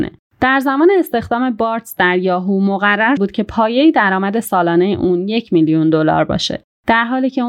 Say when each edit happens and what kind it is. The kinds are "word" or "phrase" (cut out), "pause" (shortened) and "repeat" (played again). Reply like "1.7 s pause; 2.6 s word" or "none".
3.2 s word